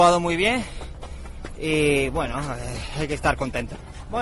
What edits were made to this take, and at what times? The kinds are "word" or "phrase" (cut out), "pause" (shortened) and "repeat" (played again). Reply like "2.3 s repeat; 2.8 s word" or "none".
none

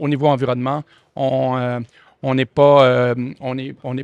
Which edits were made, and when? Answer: none

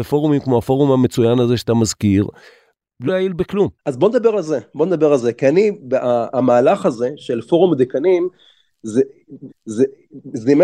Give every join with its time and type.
3.1 s word; 3.8 s pause; 9.5 s repeat

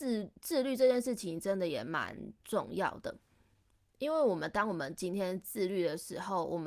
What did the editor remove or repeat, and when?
none

